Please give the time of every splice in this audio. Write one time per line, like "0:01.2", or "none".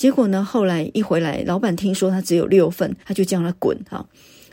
0:03.0